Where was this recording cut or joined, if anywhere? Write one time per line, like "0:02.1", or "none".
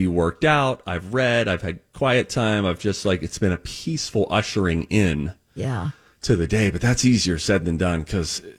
none